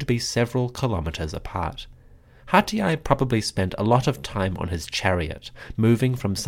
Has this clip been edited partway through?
no; 0 cuts

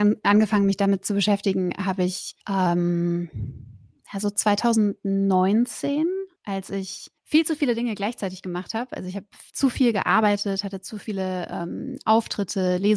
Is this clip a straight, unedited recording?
no; 4 cuts; at 2.4 s, 6.4 s, 7.2 s, 9.5 s

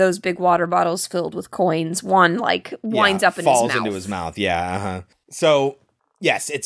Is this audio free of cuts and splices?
yes; 0 cuts

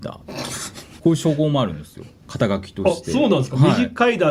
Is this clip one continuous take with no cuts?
no; 1 cut; at 1.0 s

